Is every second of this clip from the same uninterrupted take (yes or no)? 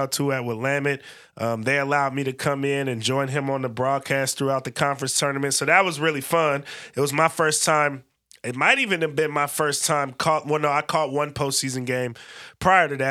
yes